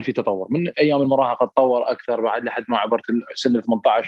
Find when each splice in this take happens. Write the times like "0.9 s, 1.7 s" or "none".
none